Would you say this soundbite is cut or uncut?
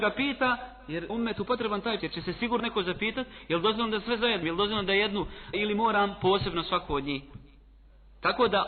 cut